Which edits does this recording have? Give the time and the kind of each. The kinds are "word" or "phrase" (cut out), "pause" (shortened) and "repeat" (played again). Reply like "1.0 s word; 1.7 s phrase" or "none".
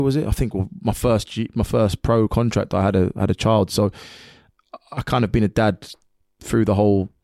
none

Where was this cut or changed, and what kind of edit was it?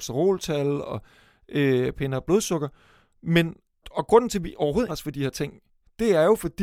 3.8 s word; 4.9 s word

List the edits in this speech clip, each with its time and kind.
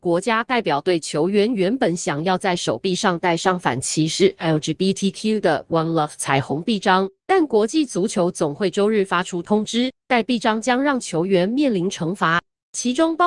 7.2 s pause; 10.0 s pause

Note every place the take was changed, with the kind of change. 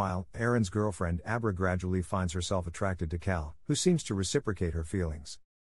3.6 s pause

